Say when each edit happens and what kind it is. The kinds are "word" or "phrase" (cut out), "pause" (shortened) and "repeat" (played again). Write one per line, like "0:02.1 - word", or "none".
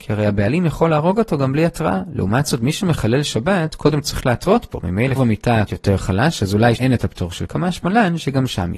0:05.2 - word
0:05.7 - word
0:06.8 - word
0:07.5 - word